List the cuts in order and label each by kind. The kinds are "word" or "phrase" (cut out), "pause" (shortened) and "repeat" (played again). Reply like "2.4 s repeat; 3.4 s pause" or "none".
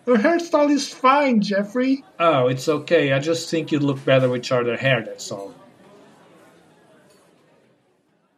2.1 s pause